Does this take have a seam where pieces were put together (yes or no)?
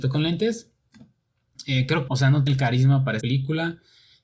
yes